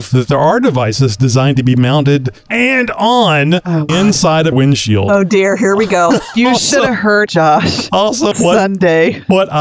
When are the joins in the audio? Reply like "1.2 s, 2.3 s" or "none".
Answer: 2.5 s, 3.9 s, 4.5 s, 6.3 s, 7.3 s, 8.3 s